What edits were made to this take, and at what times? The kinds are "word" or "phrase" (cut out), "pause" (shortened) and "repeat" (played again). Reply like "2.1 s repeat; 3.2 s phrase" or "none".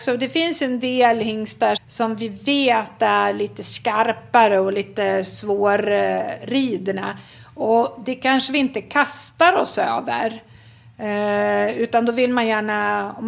1.8 s word